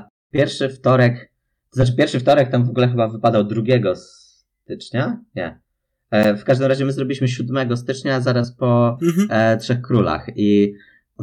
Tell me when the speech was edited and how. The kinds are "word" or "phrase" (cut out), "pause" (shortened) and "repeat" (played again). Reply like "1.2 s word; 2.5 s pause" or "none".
none